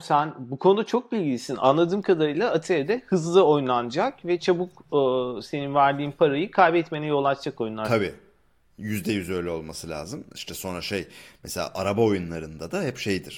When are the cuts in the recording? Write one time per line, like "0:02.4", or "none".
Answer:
none